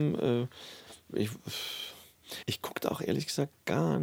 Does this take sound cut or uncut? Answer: cut